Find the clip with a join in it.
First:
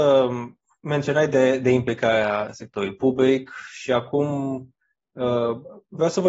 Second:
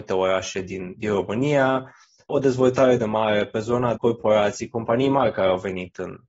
second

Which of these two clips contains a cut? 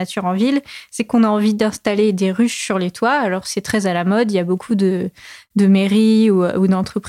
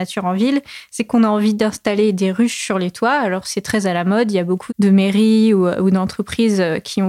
second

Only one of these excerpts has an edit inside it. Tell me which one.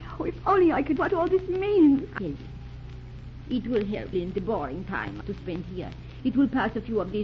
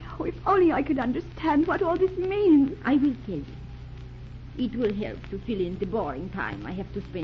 first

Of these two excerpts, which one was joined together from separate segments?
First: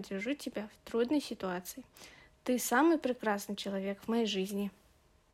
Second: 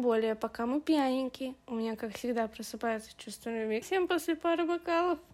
second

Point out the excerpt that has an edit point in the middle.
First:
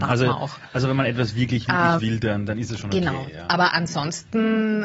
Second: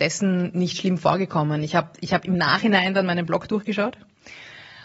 first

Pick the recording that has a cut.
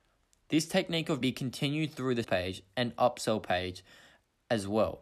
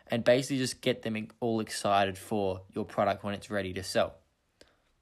first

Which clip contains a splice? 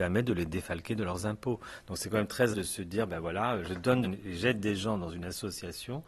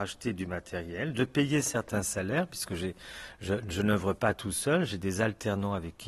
first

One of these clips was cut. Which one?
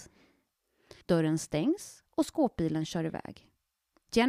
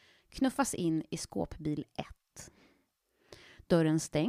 first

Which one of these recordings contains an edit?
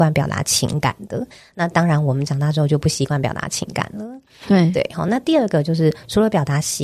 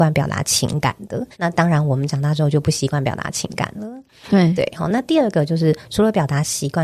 second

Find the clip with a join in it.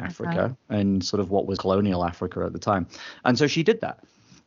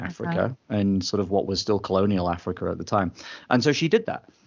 first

